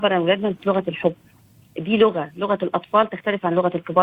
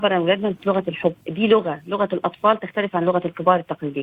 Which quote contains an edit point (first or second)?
second